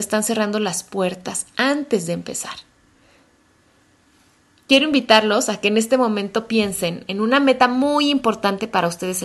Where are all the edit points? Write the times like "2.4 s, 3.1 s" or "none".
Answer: none